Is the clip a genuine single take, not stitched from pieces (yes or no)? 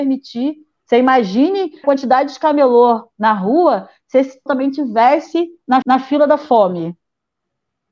no